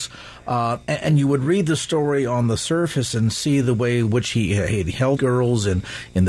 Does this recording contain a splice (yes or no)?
yes